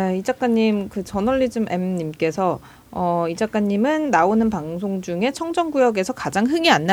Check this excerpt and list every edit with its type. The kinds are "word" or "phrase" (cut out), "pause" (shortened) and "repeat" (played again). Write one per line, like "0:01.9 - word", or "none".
none